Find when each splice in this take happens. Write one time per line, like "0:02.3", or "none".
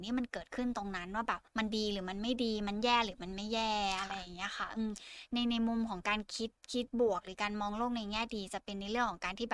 0:01.5